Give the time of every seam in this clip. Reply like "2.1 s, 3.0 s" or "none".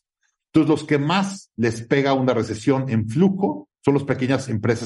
3.7 s